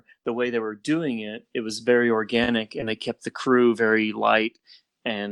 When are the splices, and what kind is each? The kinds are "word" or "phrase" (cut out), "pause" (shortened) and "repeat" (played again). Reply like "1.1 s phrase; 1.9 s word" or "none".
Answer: none